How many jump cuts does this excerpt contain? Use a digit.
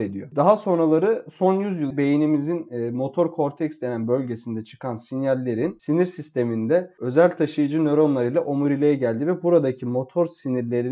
1